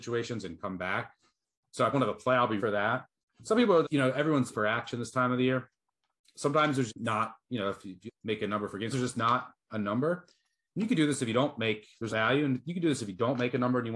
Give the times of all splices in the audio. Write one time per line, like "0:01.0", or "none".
0:01.9
0:02.6
0:03.8
0:04.5
0:06.9
0:08.1
0:08.9
0:12.1